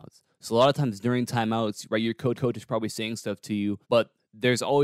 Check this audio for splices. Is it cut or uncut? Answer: cut